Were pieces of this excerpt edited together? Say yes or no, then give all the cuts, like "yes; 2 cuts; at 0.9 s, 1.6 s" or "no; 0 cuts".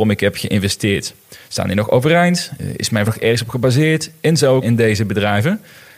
yes; 3 cuts; at 1.4 s, 3.1 s, 4.6 s